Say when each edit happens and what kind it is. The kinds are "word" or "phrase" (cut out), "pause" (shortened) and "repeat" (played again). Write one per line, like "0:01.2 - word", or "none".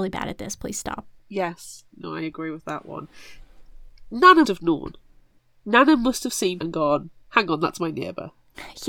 0:01.2 - pause
0:04.4 - word
0:05.4 - pause
0:06.6 - phrase